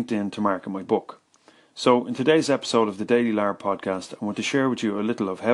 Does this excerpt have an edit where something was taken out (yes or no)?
no